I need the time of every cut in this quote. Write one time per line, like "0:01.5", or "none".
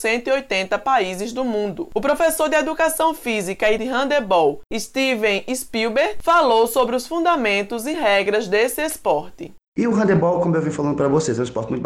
0:03.8